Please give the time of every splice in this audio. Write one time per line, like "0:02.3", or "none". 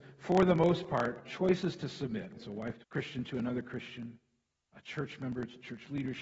0:01.2
0:02.4
0:02.8
0:04.7